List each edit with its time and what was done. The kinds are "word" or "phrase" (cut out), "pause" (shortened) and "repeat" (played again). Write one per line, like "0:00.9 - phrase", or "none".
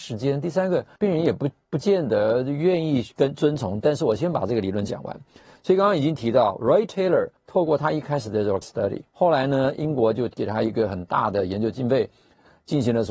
0:01.0 - pause
0:07.4 - pause
0:08.6 - word
0:09.1 - pause

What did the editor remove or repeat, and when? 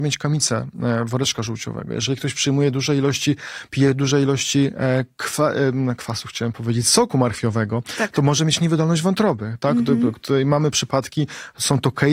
none

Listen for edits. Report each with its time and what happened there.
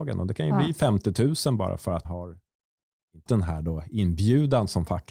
0:02.0 - word
0:03.3 - word

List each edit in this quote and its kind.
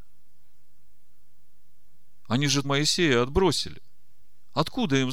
0:02.6 - word

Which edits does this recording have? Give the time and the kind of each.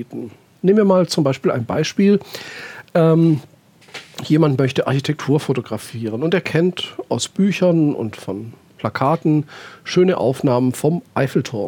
none

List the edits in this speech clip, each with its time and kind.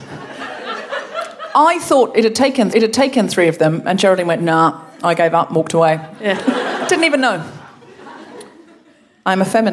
0:02.7 - repeat

